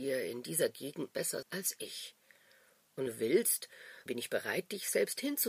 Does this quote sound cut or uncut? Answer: cut